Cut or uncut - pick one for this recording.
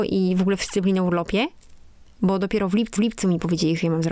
cut